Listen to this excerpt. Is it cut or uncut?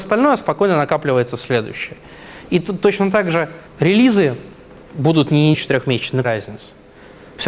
cut